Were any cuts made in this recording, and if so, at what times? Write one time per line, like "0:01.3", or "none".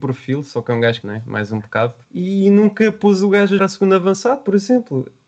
0:01.0
0:02.0
0:03.6